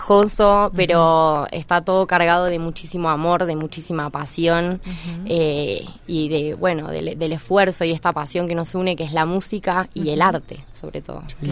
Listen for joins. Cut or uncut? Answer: uncut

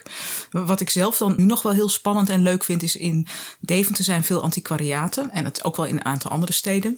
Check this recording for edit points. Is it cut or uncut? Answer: cut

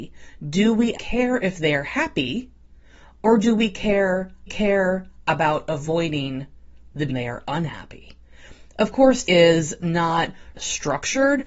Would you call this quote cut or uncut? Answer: cut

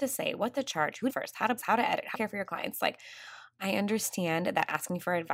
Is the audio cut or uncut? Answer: cut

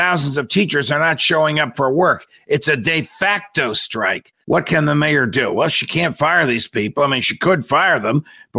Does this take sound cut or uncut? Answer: cut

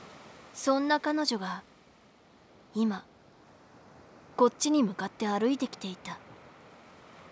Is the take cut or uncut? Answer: uncut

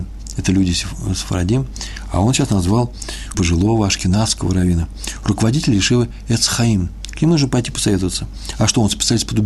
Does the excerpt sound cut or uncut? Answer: cut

